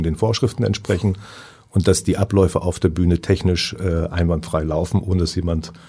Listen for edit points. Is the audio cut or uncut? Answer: uncut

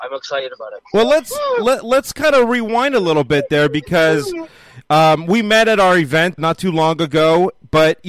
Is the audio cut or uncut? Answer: cut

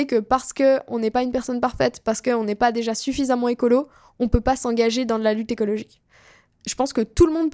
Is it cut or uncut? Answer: uncut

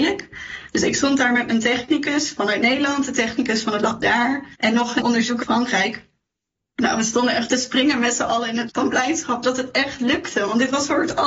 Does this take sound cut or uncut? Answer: cut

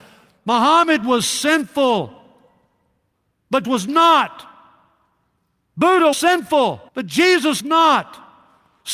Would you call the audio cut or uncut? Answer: cut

